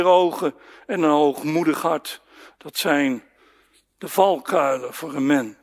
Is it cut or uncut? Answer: uncut